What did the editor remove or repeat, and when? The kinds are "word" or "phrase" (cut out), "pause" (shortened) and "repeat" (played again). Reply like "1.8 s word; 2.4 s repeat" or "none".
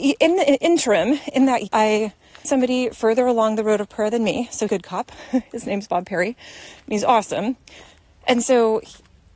1.7 s word; 2.4 s word; 4.7 s word

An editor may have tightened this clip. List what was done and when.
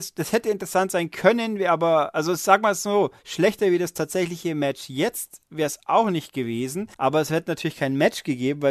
5.5 s pause; 6.9 s pause

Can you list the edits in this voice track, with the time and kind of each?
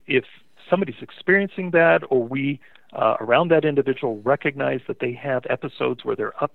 none

